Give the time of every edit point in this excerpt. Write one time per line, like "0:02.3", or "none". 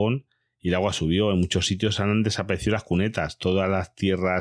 none